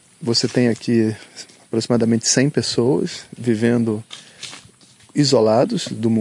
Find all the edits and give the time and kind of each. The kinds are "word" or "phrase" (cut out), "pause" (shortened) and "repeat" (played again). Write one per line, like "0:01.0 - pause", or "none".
none